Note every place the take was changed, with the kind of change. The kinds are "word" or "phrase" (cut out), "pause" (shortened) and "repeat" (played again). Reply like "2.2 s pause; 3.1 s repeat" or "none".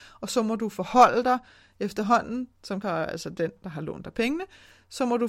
2.8 s phrase